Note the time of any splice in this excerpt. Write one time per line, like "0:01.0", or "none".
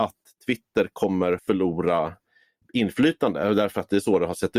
0:01.4
0:02.6